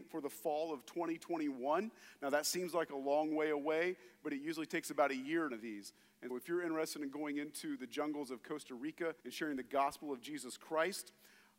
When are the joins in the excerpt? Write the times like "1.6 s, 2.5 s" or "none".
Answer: 5.5 s, 6.3 s, 9.2 s